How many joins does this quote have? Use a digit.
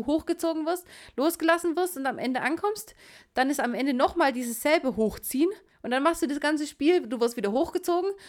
0